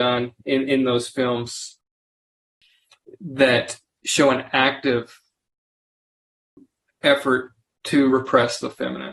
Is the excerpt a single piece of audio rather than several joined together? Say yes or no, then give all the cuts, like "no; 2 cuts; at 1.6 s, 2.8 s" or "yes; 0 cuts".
yes; 0 cuts